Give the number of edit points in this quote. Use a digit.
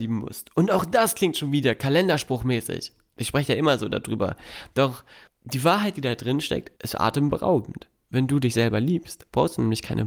2